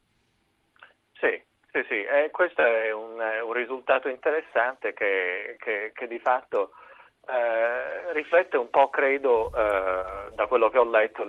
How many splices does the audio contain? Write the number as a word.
zero